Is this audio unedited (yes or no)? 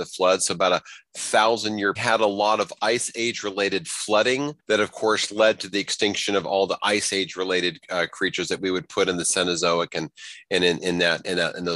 no